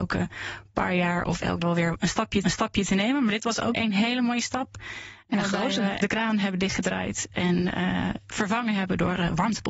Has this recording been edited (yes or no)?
yes